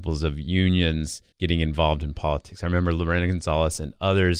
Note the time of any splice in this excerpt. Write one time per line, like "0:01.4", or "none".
0:01.3